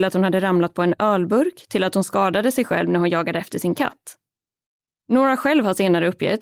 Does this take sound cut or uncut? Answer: uncut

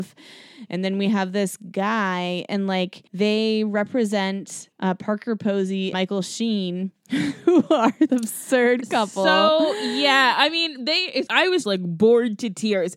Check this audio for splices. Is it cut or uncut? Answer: cut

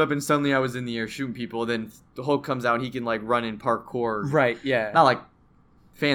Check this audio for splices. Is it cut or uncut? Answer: uncut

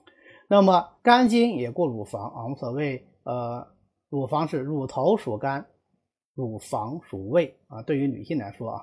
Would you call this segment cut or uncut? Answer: cut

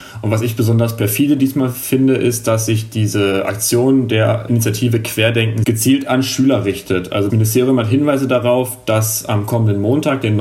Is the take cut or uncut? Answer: cut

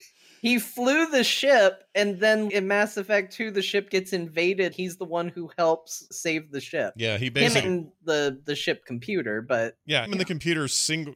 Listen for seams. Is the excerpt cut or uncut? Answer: cut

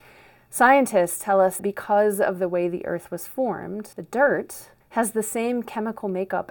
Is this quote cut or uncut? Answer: cut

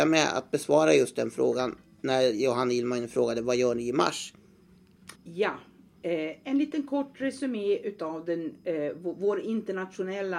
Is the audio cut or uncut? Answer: cut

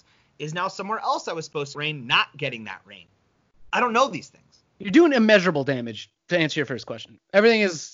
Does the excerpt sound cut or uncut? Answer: cut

